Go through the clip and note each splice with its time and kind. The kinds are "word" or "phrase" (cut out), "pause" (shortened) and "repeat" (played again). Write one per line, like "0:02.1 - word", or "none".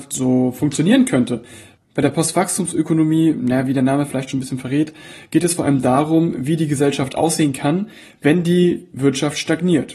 none